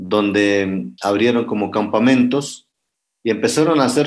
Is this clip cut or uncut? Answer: uncut